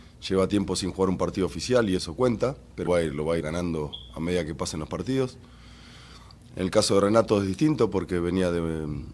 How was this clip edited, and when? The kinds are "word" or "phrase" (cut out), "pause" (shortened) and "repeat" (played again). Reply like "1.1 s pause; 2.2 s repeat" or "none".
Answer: 2.0 s word; 2.9 s word; 3.4 s word